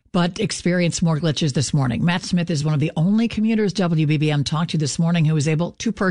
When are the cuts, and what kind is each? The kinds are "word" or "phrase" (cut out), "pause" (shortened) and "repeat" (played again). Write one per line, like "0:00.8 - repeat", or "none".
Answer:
none